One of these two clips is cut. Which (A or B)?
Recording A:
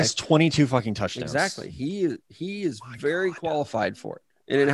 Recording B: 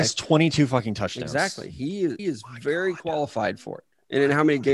B